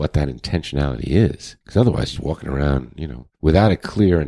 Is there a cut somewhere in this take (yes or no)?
yes